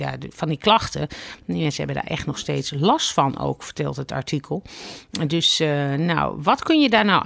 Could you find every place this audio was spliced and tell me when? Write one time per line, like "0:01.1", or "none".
none